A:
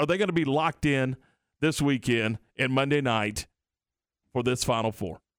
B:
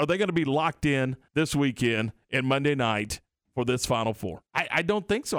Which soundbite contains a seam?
B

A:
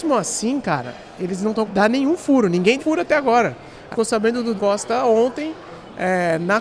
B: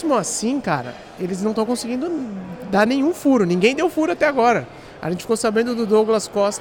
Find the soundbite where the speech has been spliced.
A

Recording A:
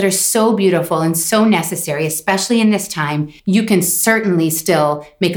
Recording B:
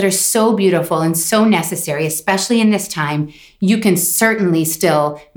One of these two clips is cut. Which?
A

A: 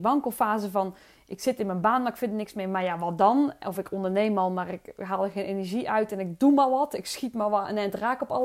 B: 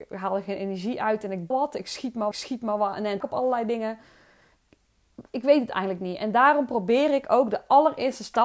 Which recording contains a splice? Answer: B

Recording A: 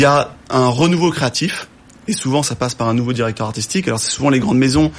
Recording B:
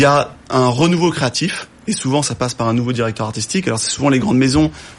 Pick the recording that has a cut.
B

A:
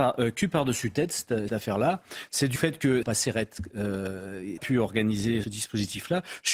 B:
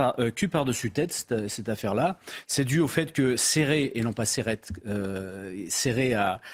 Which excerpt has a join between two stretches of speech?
A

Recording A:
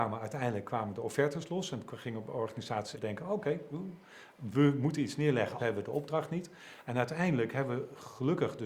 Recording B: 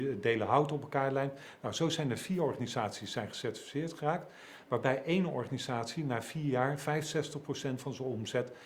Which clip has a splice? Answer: A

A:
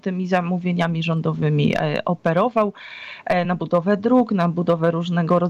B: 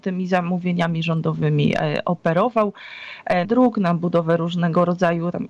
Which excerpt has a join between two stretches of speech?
B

